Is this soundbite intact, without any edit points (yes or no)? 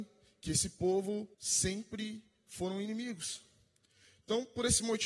no